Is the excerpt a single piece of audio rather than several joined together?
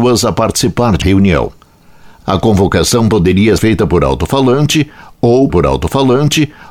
no; 4 cuts; at 1.0 s, 2.2 s, 3.6 s, 5.5 s

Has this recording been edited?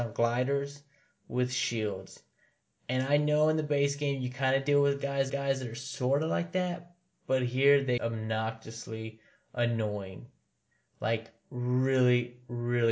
yes; 2 cuts; at 5.3 s, 8.0 s

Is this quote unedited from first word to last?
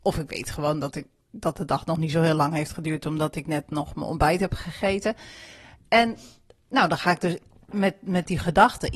yes; 0 cuts

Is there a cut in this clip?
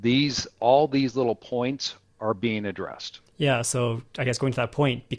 no; 0 cuts

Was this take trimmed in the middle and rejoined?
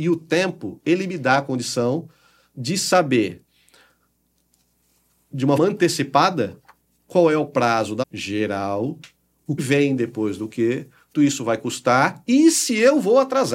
yes; 4 cuts; at 5.6 s, 8.0 s, 9.6 s, 11.1 s

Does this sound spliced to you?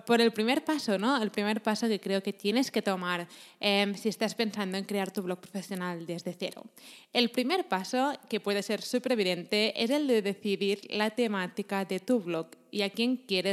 no; 0 cuts

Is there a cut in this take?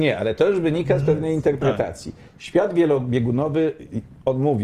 no; 0 cuts

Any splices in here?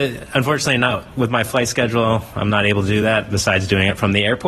no; 0 cuts

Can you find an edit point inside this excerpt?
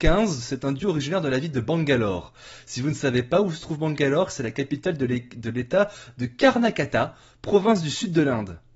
no; 0 cuts

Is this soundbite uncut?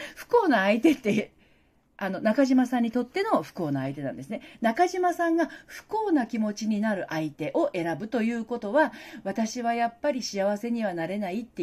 yes; 0 cuts

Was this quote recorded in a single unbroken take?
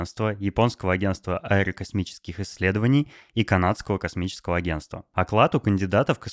yes; 0 cuts

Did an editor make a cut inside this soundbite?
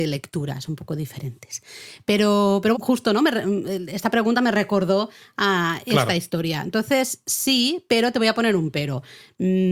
yes; 1 cut; at 2.7 s

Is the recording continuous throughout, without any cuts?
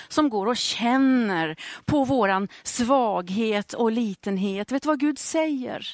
yes; 0 cuts

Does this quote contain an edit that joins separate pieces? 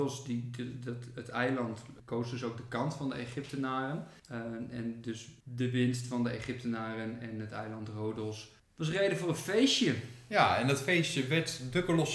no; 0 cuts

